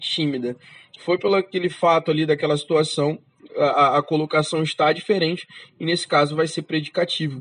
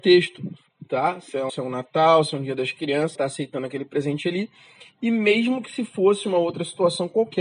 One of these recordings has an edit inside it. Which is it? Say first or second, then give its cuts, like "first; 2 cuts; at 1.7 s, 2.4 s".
second; 2 cuts; at 1.5 s, 3.2 s